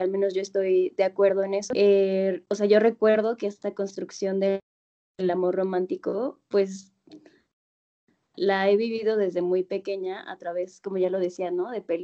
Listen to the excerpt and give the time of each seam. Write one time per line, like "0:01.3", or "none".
0:08.3